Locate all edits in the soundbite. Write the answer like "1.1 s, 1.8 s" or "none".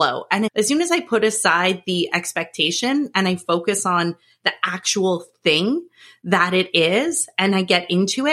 none